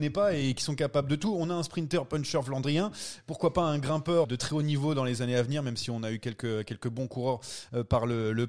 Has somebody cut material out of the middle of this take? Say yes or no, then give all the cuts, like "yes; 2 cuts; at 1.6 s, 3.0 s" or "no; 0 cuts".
yes; 1 cut; at 4.2 s